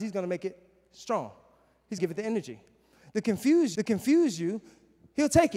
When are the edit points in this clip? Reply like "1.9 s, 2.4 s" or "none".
2.0 s, 3.7 s